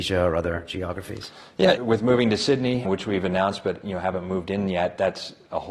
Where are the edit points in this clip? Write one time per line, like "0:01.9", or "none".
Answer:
0:01.8
0:02.8

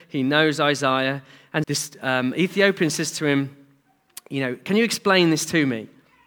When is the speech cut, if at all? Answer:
0:01.6

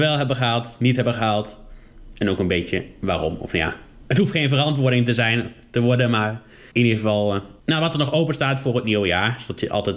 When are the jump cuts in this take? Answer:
0:06.7
0:07.6

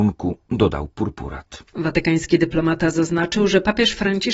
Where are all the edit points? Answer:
none

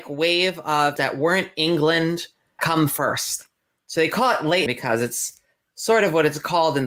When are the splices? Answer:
0:01.0
0:02.6
0:04.7

